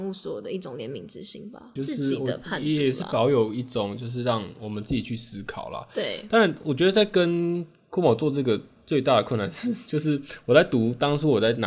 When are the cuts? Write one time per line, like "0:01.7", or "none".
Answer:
0:01.8

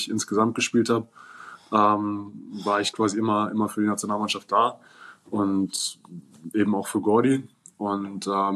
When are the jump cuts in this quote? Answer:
none

